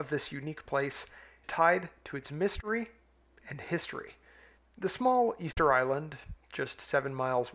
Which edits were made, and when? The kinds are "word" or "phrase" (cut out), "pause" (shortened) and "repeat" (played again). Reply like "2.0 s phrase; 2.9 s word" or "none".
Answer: 1.4 s word; 4.6 s pause